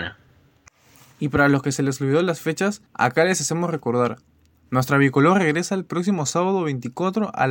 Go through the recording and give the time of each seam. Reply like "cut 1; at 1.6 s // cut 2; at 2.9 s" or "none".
cut 1; at 2.9 s

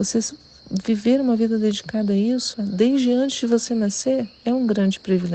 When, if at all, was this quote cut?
cut 1; at 2.5 s

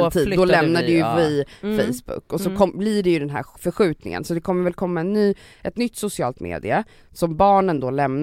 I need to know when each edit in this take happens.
none

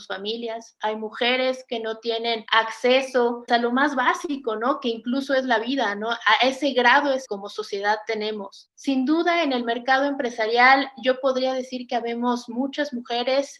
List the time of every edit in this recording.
cut 1; at 3.5 s // cut 2; at 7.3 s

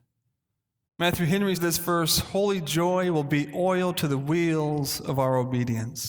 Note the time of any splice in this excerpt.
cut 1; at 1.5 s

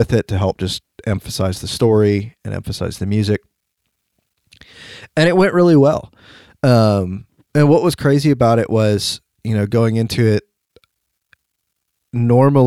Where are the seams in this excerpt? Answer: none

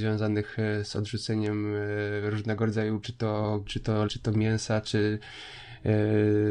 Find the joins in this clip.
cut 1; at 3.0 s // cut 2; at 3.7 s // cut 3; at 4.1 s

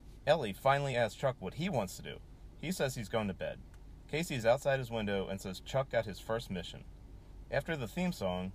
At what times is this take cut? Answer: none

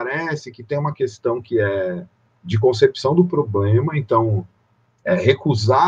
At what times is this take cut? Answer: none

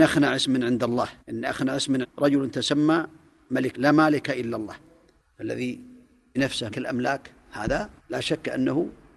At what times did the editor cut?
cut 1; at 1.2 s // cut 2; at 2.0 s // cut 3; at 3.7 s // cut 4; at 6.4 s // cut 5; at 6.7 s // cut 6; at 8.0 s

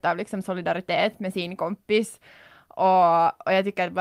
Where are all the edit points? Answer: none

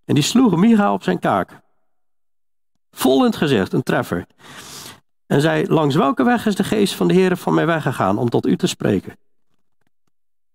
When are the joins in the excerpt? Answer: none

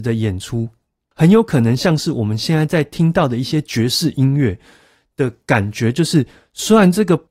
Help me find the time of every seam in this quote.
none

